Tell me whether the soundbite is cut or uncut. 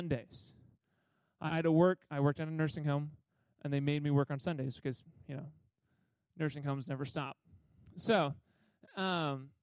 cut